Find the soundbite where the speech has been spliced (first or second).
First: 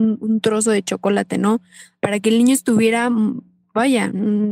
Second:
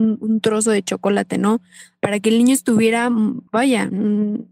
second